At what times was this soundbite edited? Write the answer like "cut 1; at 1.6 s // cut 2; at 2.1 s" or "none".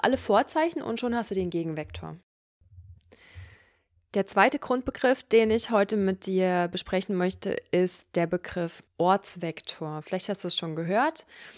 none